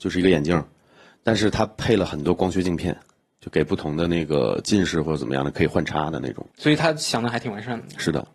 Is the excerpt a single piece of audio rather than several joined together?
yes; 0 cuts

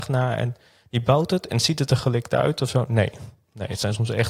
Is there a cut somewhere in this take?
no; 0 cuts

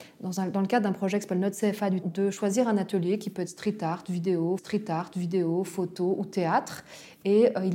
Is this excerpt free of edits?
no; 2 cuts; at 2.0 s, 4.6 s

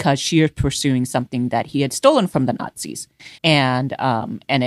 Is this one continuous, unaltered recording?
no; 1 cut; at 3.4 s

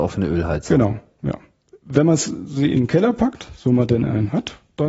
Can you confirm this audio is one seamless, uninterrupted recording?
yes; 0 cuts

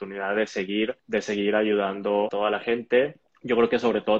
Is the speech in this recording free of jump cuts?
no; 3 cuts; at 1.0 s, 2.3 s, 3.2 s

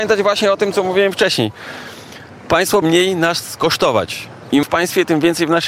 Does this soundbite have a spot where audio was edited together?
yes; 2 cuts; at 2.8 s, 4.6 s

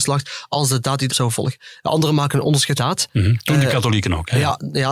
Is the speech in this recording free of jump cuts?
no; 2 cuts; at 1.1 s, 2.8 s

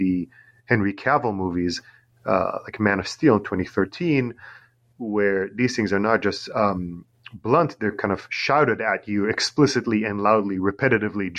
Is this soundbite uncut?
yes; 0 cuts

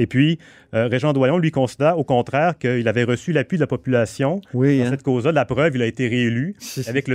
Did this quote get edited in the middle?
no; 0 cuts

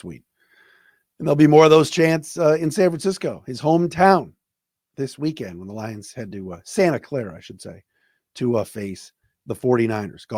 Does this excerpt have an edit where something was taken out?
no; 0 cuts

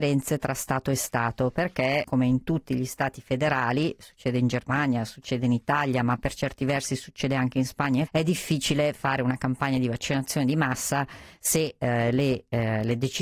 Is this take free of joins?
no; 2 cuts; at 2.0 s, 8.1 s

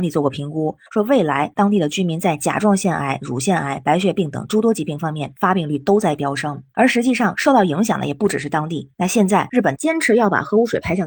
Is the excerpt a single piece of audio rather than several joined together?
yes; 0 cuts

